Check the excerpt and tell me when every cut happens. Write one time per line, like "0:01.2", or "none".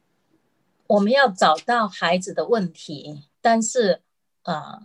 0:03.3

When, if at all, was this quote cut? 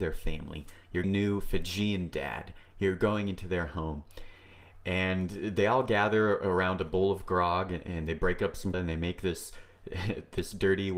0:01.0
0:08.7

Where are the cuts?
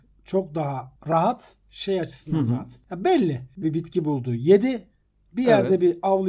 0:01.0
0:03.6

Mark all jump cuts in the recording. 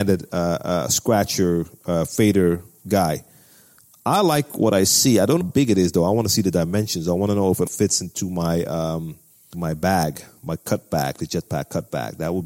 0:05.4
0:07.7
0:09.5

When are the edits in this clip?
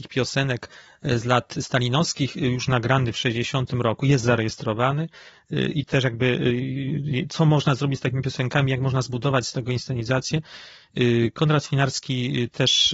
0:05.9

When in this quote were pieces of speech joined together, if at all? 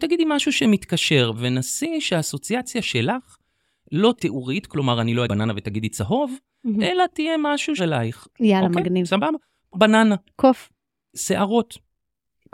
0:04.2
0:05.3
0:07.8
0:09.7

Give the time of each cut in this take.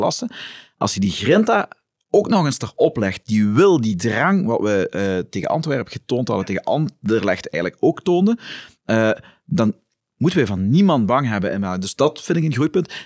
none

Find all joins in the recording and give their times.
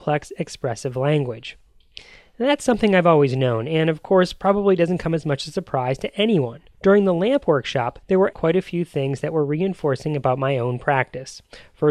0:06.7
0:08.0
0:08.3

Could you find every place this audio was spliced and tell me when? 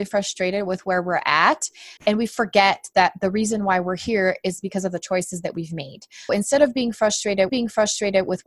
0:02.0
0:06.3
0:07.5

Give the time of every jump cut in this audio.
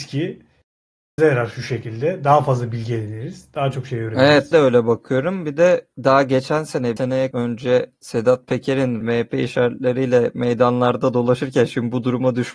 0:01.2
0:04.5
0:05.9
0:07.0
0:07.3
0:09.0

